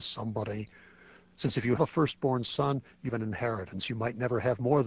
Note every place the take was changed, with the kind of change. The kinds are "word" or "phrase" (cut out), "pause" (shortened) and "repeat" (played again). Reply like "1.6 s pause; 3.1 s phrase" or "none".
1.8 s word; 3.1 s word